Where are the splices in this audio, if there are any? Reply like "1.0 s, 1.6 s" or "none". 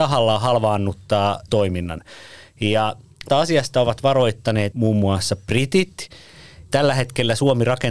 1.5 s, 3.3 s, 4.7 s, 6.7 s